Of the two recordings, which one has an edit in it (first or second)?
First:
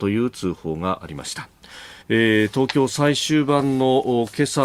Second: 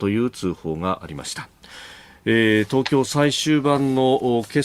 first